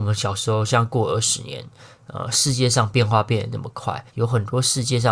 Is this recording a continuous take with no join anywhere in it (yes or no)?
no